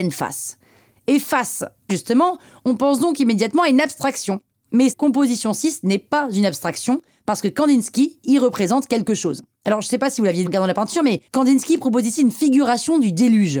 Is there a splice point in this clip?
yes; 4 cuts; at 1.9 s, 4.9 s, 10.5 s, 11.3 s

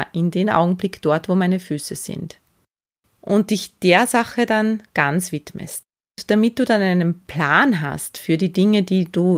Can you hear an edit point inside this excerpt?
no; 0 cuts

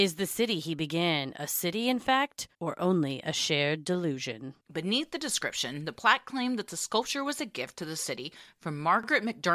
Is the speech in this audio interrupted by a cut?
yes; 2 cuts; at 2.5 s, 4.6 s

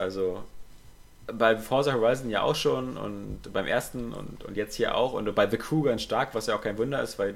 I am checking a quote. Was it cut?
no; 0 cuts

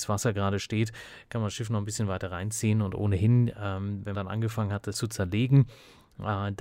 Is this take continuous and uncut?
no; 2 cuts; at 4.1 s, 4.9 s

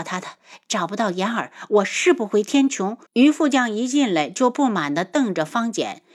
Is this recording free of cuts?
no; 1 cut; at 3.1 s

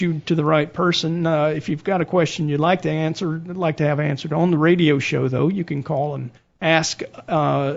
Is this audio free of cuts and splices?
no; 1 cut; at 6.4 s

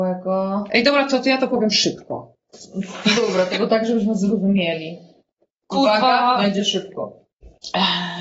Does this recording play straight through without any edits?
yes; 0 cuts

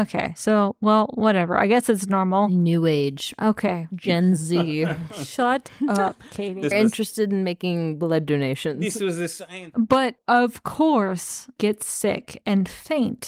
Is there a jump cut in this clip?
yes; 2 cuts; at 6.7 s, 11.6 s

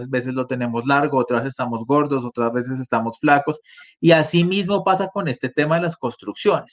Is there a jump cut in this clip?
no; 0 cuts

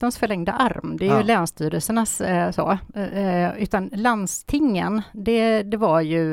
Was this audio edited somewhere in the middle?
no; 0 cuts

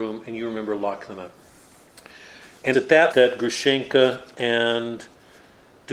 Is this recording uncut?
no; 2 cuts; at 2.7 s, 3.1 s

